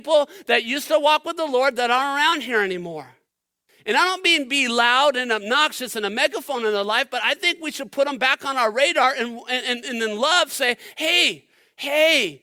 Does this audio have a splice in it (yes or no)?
no